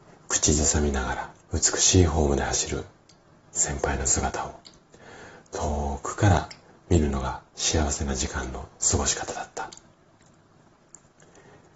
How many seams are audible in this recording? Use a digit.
2